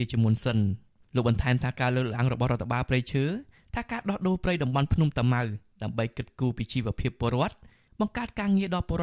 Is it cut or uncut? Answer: uncut